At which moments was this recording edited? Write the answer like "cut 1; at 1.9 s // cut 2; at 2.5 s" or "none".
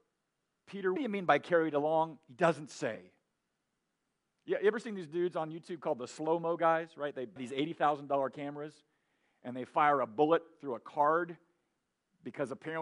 cut 1; at 1.0 s // cut 2; at 7.4 s